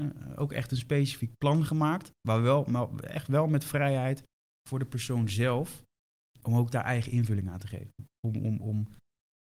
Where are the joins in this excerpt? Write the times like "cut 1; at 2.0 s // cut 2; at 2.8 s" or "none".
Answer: none